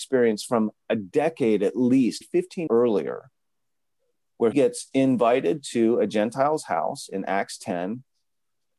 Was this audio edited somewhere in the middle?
yes; 3 cuts; at 2.2 s, 2.7 s, 4.5 s

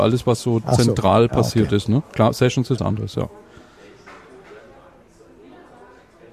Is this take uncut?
no; 1 cut; at 2.8 s

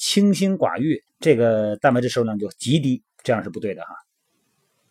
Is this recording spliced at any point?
yes; 1 cut; at 1.1 s

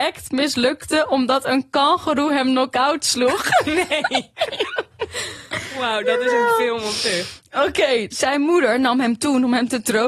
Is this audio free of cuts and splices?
yes; 0 cuts

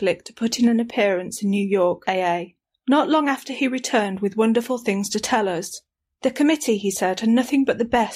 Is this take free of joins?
yes; 0 cuts

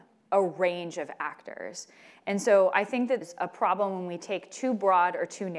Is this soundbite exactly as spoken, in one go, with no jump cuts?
no; 1 cut; at 3.2 s

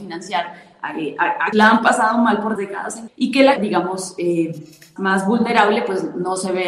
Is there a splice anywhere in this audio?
yes; 5 cuts; at 1.5 s, 2.6 s, 3.1 s, 3.6 s, 5.0 s

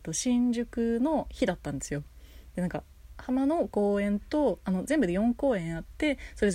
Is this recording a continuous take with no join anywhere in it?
no; 1 cut; at 3.1 s

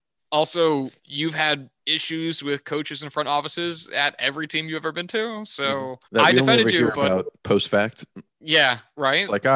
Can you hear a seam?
yes; 5 cuts; at 1.0 s, 1.8 s, 6.0 s, 7.4 s, 8.3 s

